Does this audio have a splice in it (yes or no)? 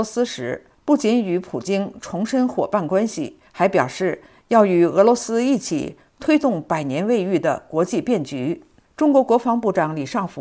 no